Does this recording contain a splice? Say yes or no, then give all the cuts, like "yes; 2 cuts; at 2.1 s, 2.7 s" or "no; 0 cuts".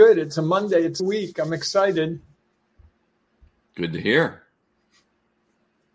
yes; 1 cut; at 1.0 s